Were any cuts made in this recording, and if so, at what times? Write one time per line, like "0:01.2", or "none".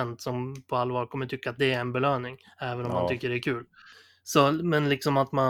none